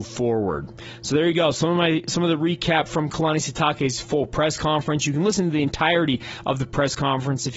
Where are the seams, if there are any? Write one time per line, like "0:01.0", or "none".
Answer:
none